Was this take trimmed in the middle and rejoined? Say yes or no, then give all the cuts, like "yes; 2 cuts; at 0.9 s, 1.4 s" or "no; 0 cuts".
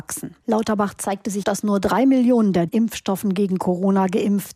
yes; 2 cuts; at 1.4 s, 2.7 s